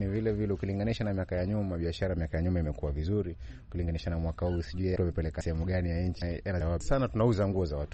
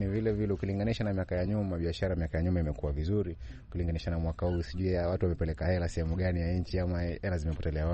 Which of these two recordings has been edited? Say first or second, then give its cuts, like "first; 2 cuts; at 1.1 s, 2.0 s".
first; 4 cuts; at 5.0 s, 5.4 s, 6.2 s, 6.6 s